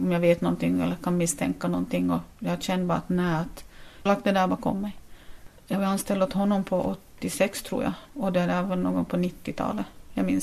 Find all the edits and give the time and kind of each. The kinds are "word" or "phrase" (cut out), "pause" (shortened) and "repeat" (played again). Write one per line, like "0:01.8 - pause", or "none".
0:04.1 - phrase
0:05.6 - pause
0:08.1 - pause